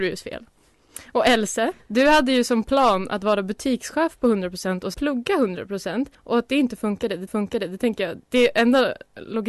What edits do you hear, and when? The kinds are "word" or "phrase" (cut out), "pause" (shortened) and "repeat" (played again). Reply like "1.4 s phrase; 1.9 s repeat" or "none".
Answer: 1.8 s pause; 4.9 s word; 6.1 s pause; 7.3 s repeat; 8.2 s pause